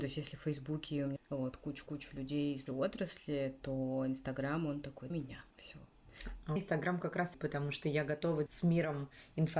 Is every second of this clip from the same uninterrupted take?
no; 7 cuts; at 1.2 s, 2.7 s, 5.1 s, 5.5 s, 6.6 s, 7.3 s, 8.5 s

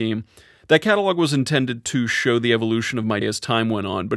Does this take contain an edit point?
yes; 1 cut; at 3.2 s

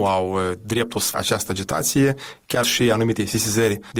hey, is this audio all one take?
no; 2 cuts; at 1.1 s, 2.6 s

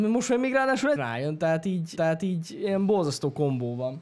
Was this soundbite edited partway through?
yes; 2 cuts; at 1.0 s, 2.0 s

